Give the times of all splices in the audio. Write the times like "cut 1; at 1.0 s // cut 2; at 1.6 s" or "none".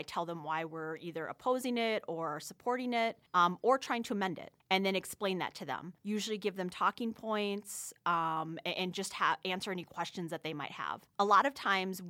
cut 1; at 3.3 s // cut 2; at 4.6 s // cut 3; at 6.0 s // cut 4; at 11.1 s

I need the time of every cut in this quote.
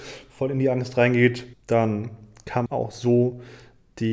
cut 1; at 1.5 s // cut 2; at 2.7 s

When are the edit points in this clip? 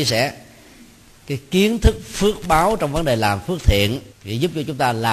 cut 1; at 4.1 s

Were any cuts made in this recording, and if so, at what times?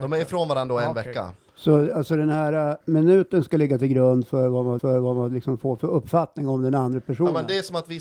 cut 1; at 2.8 s // cut 2; at 4.8 s

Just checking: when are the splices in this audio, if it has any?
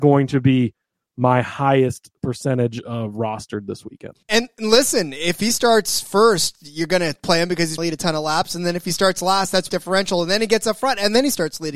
cut 1; at 4.2 s // cut 2; at 7.8 s // cut 3; at 9.7 s

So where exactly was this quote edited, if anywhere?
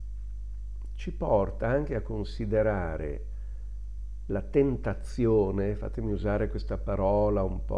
none

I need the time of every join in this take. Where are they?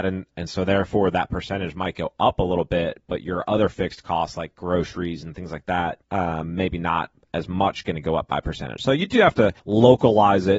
cut 1; at 6.0 s // cut 2; at 9.6 s

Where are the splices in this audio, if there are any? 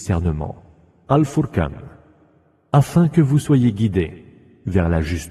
none

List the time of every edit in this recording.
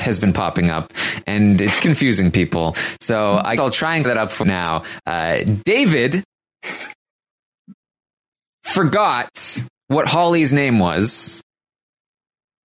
cut 1; at 1.8 s // cut 2; at 3.6 s // cut 3; at 4.0 s // cut 4; at 4.4 s

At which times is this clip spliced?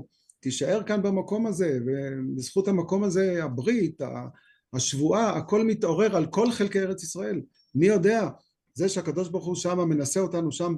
none

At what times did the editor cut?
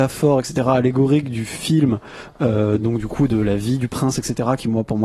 none

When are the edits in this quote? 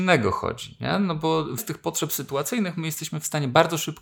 cut 1; at 1.6 s

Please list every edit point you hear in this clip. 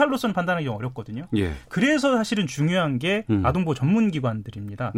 none

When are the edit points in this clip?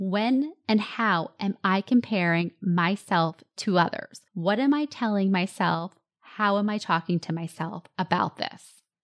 cut 1; at 4.3 s

